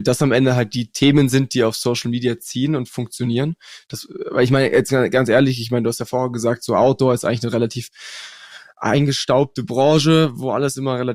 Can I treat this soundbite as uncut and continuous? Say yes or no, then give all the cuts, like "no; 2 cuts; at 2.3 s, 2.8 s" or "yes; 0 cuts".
yes; 0 cuts